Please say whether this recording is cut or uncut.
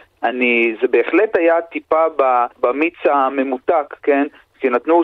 cut